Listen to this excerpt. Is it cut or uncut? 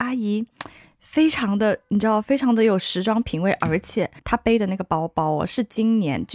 cut